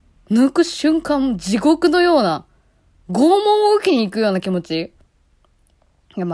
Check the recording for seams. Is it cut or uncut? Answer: uncut